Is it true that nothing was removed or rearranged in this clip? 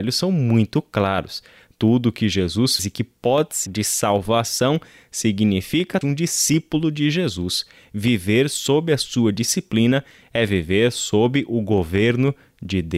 no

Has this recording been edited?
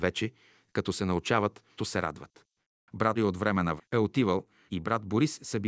yes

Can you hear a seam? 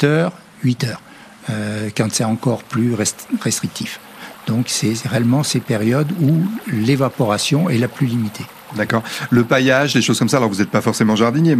no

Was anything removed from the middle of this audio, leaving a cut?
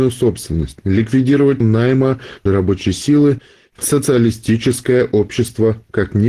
yes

